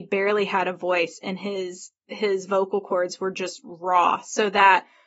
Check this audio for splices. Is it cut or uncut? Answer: cut